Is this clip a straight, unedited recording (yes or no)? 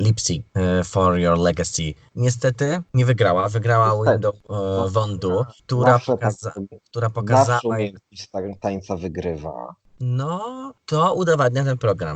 yes